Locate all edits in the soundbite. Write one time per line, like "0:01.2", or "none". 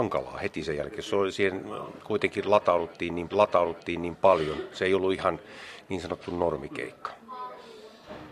0:03.3